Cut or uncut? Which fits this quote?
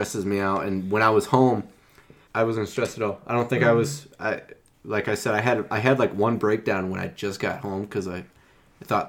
cut